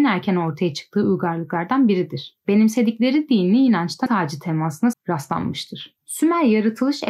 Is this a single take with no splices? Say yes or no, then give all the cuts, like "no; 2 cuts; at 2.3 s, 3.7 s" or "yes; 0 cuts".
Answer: no; 2 cuts; at 4.1 s, 4.9 s